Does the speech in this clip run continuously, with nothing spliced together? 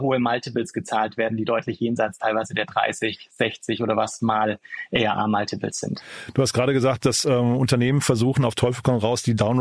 yes; 0 cuts

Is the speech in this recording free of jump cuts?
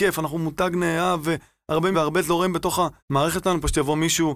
no; 2 cuts; at 1.9 s, 3.0 s

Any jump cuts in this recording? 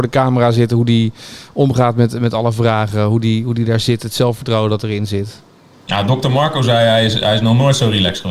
no; 0 cuts

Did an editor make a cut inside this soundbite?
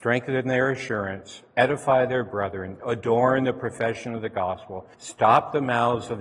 yes; 1 cut; at 4.9 s

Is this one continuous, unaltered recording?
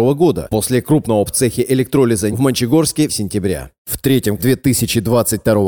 no; 4 cuts; at 1.3 s, 2.3 s, 3.1 s, 4.4 s

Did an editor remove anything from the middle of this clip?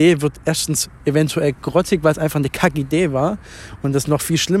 no; 0 cuts

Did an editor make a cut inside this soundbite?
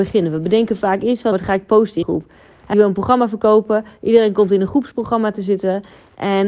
yes; 3 cuts; at 1.3 s, 2.0 s, 2.7 s

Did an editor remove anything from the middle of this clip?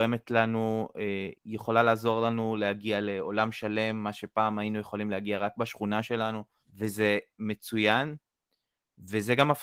yes; 2 cuts; at 1.3 s, 6.6 s

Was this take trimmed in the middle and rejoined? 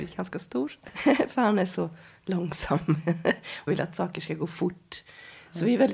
yes; 1 cut; at 3.7 s

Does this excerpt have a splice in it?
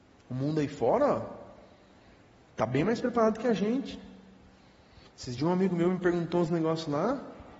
no; 0 cuts

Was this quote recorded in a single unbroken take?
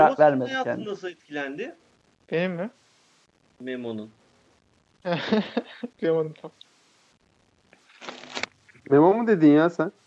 no; 2 cuts; at 2.0 s, 5.9 s

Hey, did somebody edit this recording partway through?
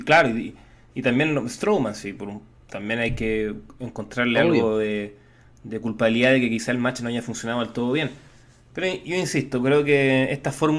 no; 0 cuts

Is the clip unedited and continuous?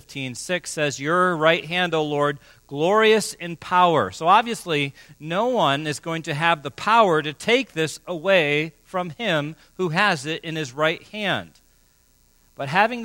yes; 0 cuts

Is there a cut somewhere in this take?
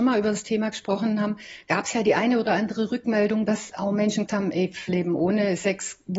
yes; 2 cuts; at 4.3 s, 4.9 s

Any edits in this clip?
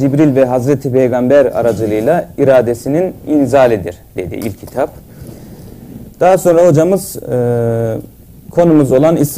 no; 0 cuts

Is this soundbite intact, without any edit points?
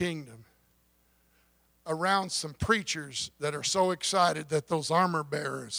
yes; 0 cuts

